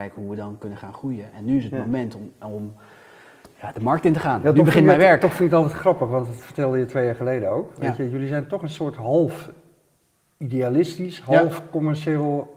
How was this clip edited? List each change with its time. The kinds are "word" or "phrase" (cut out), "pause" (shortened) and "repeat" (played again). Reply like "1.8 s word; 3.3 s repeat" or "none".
none